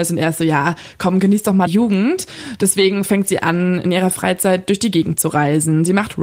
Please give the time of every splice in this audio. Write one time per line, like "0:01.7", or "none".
0:01.7

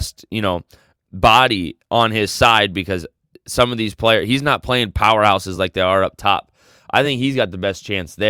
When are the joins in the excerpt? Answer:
none

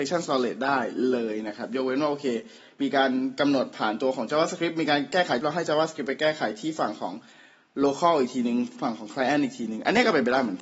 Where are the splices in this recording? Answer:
0:05.4

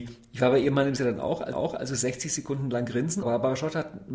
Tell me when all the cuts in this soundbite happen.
0:01.0
0:01.5
0:03.2

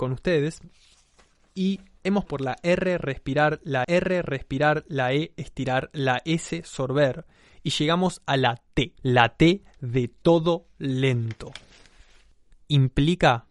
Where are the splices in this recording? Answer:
0:02.3
0:03.8
0:09.0

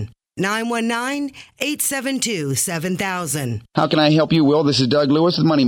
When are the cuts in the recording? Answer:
none

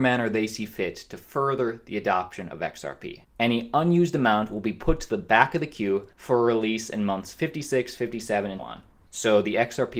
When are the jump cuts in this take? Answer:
0:06.1
0:08.6

